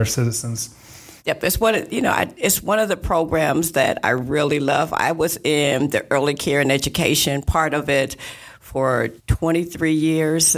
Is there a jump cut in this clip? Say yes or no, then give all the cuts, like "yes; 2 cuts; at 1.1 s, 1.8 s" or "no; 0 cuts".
yes; 2 cuts; at 1.2 s, 9.2 s